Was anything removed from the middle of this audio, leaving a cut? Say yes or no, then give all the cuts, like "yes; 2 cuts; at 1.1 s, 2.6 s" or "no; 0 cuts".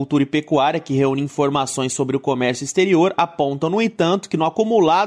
no; 0 cuts